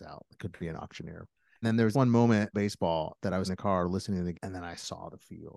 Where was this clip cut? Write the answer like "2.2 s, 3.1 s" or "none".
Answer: 1.6 s, 1.9 s, 2.5 s, 3.5 s, 4.3 s